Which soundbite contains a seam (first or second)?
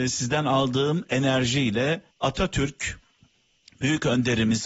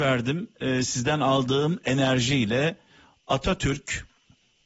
first